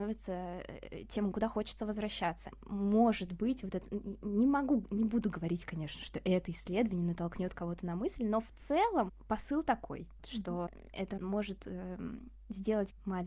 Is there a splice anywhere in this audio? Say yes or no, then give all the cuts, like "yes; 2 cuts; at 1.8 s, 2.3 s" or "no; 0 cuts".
yes; 2 cuts; at 1.3 s, 10.2 s